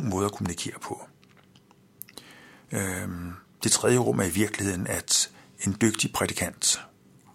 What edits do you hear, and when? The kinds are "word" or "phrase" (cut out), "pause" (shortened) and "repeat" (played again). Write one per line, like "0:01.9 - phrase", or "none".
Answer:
none